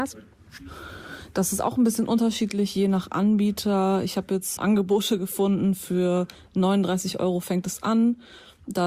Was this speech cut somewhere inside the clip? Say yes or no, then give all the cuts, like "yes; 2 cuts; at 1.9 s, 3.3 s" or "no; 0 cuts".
yes; 1 cut; at 4.6 s